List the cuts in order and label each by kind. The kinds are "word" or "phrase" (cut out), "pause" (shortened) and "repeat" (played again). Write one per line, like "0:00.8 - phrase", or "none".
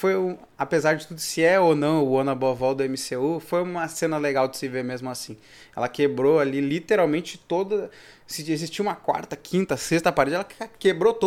none